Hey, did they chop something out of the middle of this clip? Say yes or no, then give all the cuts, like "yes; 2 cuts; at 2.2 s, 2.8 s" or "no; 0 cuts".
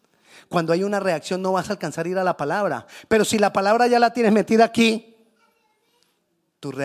no; 0 cuts